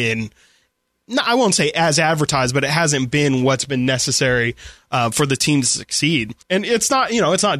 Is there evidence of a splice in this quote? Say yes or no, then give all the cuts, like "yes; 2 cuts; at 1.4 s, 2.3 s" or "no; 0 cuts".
yes; 1 cut; at 6.4 s